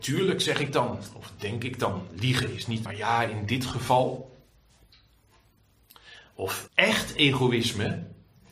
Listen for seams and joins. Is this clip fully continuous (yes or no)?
no